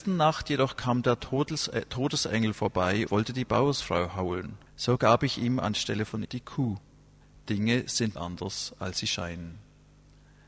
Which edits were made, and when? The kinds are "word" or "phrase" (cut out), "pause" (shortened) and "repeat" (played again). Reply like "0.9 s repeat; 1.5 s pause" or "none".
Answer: 3.1 s word; 4.7 s pause; 6.2 s word; 7.2 s pause; 8.1 s word